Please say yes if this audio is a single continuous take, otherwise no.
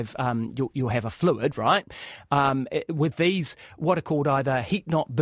yes